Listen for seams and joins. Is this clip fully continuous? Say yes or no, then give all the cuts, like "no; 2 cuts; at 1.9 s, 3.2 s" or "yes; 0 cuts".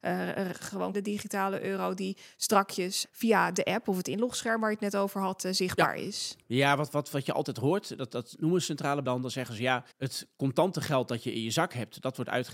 no; 5 cuts; at 0.9 s, 3.0 s, 6.4 s, 9.0 s, 9.9 s